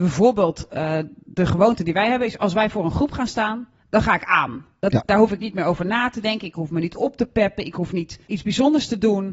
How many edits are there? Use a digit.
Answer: 1